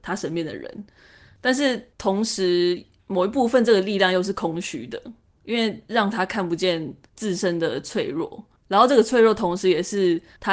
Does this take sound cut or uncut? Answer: cut